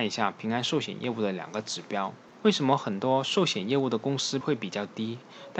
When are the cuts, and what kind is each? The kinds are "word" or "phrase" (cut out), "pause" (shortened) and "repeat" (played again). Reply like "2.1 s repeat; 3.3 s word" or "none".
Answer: 4.4 s word